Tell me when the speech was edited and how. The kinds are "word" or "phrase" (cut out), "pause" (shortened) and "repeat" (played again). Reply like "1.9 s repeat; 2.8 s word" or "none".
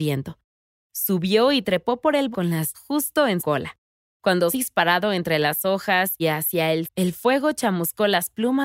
2.3 s word; 2.7 s word; 3.4 s word; 4.5 s word; 6.2 s word; 6.8 s word

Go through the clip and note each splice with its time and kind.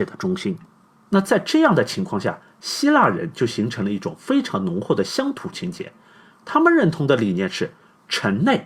none

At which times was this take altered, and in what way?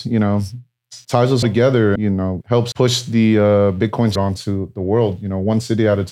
1.0 s word; 1.4 s word; 2.0 s word; 2.4 s word; 2.7 s word; 4.2 s word

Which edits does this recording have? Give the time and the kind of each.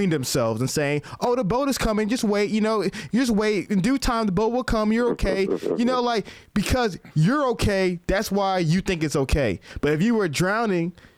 none

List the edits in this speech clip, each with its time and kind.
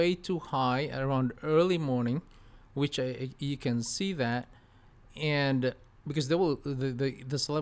none

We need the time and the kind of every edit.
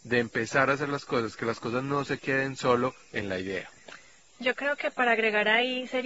none

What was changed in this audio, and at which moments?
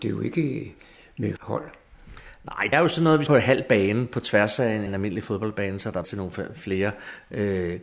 1.4 s word; 2.7 s word; 3.3 s word; 4.9 s word; 6.0 s word

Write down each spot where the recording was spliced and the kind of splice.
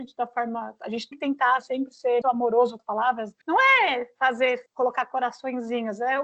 1.1 s word; 2.2 s word; 2.8 s word; 3.4 s pause; 4.7 s pause

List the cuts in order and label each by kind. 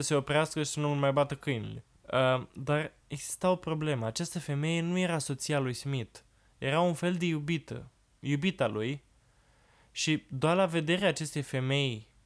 none

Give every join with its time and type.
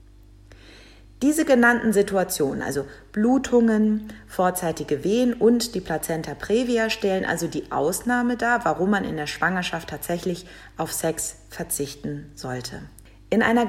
none

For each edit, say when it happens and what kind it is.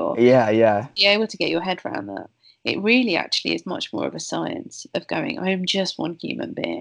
none

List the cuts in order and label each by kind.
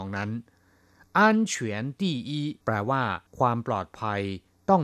2.6 s pause; 3.3 s pause

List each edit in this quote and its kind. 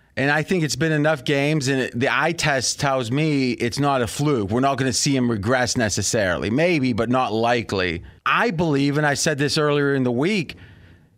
8.2 s pause

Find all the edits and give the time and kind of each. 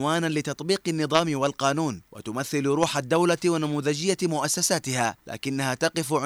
2.1 s pause; 5.2 s pause

